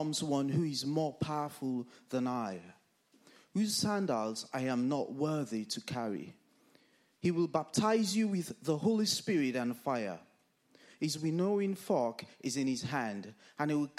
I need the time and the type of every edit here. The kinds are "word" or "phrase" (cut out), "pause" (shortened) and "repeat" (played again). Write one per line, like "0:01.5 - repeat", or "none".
none